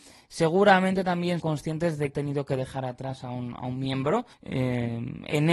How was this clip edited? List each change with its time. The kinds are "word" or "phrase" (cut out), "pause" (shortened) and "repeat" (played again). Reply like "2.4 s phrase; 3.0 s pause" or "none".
1.4 s word; 2.1 s phrase; 4.3 s pause